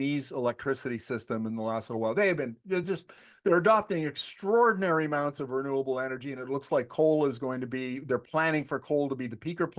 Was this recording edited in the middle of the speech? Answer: no; 0 cuts

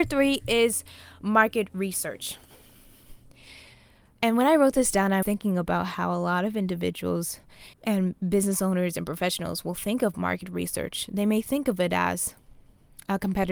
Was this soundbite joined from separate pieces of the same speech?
yes; 2 cuts; at 5.2 s, 7.7 s

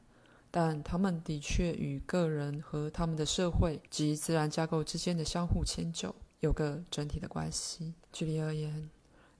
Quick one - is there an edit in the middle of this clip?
yes; 3 cuts; at 3.9 s, 6.3 s, 8.0 s

